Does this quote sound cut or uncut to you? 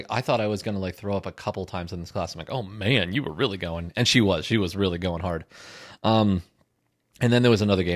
uncut